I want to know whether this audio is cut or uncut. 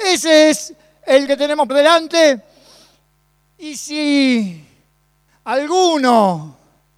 cut